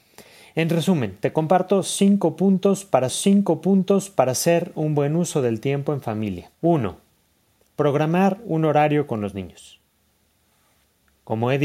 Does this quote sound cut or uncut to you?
cut